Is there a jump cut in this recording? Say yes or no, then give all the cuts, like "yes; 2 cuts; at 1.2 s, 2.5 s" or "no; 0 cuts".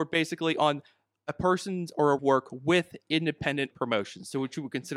yes; 2 cuts; at 2.2 s, 3.7 s